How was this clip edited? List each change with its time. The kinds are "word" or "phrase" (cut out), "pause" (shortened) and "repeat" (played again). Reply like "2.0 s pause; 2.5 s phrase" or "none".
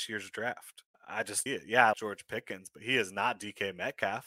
0.9 s pause; 1.5 s phrase; 1.9 s word